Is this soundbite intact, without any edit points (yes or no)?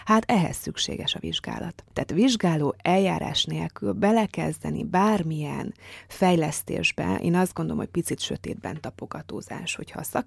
yes